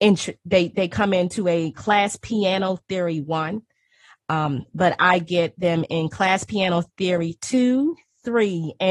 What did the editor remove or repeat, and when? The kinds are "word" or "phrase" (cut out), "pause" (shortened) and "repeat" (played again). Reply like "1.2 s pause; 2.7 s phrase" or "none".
none